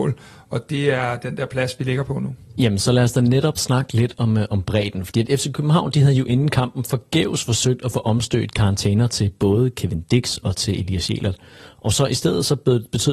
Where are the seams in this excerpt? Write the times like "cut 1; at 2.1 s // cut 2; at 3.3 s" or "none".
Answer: none